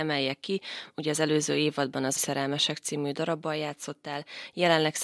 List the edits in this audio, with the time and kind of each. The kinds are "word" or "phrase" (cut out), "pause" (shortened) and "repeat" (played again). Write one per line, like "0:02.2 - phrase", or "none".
0:02.2 - word